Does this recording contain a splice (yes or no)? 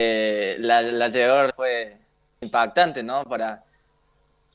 yes